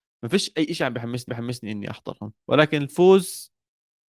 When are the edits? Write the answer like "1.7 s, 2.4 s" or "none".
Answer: 1.3 s, 2.4 s